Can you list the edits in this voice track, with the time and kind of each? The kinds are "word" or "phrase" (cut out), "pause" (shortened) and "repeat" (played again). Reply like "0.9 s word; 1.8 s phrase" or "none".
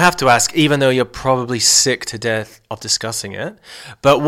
none

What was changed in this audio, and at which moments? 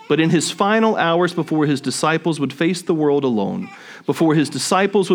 none

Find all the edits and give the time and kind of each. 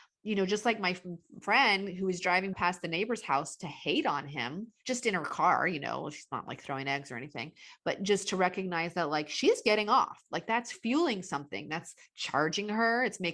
4.8 s pause

